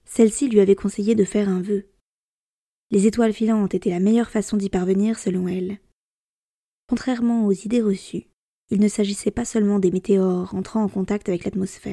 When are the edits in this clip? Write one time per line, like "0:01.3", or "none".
none